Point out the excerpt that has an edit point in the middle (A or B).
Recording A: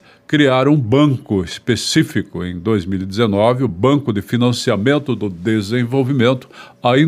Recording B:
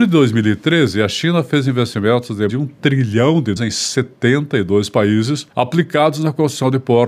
B